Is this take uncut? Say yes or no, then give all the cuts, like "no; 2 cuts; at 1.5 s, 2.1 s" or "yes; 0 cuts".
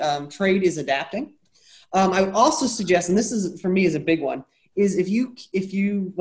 yes; 0 cuts